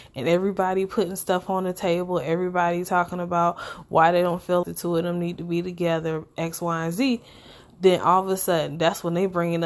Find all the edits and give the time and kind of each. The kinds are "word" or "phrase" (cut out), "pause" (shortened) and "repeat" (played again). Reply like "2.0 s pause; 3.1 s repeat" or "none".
4.6 s word